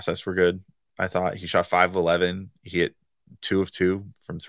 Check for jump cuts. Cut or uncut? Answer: uncut